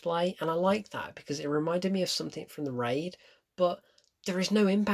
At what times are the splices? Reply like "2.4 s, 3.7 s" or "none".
none